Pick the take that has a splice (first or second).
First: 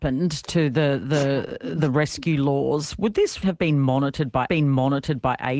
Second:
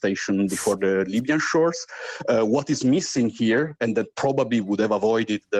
first